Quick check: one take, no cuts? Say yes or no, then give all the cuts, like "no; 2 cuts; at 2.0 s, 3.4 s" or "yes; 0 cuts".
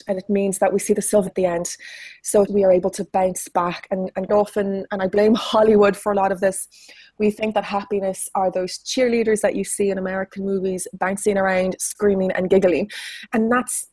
no; 3 cuts; at 1.3 s, 2.5 s, 4.3 s